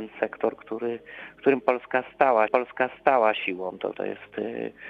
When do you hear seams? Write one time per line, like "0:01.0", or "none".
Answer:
0:02.5
0:03.9